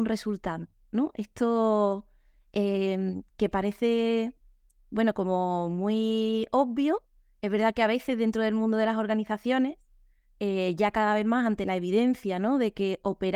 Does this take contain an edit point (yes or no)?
no